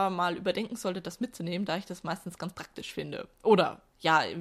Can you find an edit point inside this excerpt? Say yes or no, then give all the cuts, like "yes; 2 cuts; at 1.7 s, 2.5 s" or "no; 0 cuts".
no; 0 cuts